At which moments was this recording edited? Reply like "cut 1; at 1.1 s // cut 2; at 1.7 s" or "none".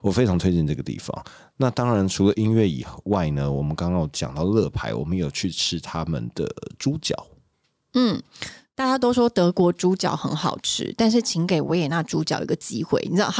none